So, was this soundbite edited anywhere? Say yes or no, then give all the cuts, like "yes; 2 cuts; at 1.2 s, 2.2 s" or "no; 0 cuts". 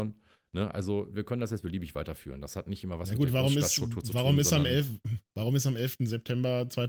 yes; 1 cut; at 5.3 s